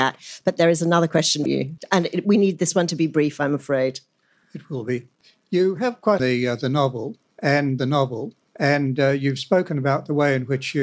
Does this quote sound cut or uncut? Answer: cut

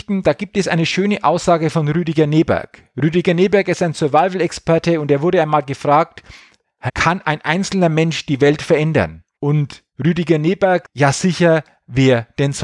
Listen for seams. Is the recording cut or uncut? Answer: cut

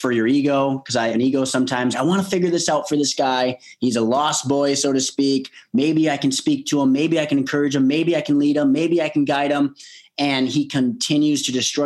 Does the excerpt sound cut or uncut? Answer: cut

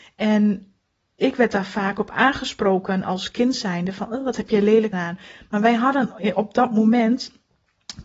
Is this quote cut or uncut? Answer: cut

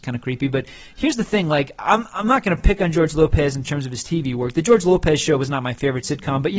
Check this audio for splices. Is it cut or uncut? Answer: uncut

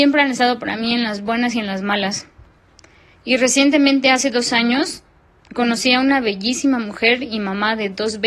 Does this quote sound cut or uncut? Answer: uncut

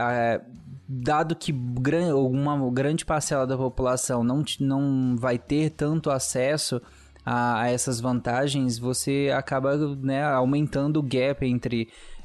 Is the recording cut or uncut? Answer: uncut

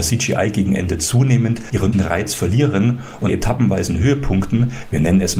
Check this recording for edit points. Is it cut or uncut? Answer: cut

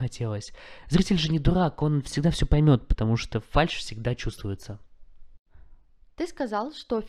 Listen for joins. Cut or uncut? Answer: uncut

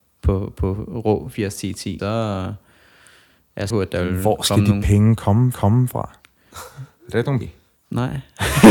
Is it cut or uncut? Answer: cut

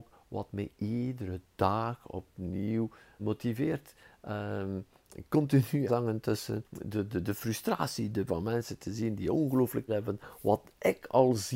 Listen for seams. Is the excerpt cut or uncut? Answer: cut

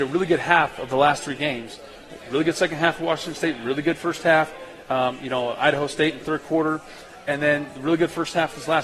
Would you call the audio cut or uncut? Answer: uncut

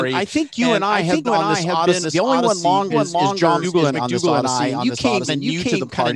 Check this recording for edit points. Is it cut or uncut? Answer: cut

